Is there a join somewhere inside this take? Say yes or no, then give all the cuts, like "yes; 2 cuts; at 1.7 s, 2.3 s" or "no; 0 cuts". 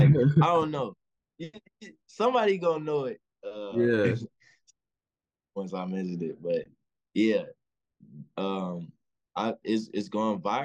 no; 0 cuts